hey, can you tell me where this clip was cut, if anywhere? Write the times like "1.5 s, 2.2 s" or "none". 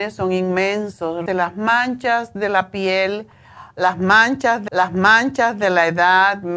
1.3 s, 4.7 s